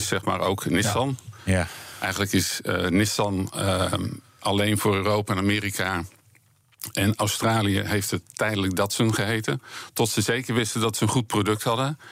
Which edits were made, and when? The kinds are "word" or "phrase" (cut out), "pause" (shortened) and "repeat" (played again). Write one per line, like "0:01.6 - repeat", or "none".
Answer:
none